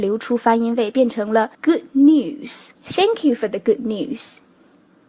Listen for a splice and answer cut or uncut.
cut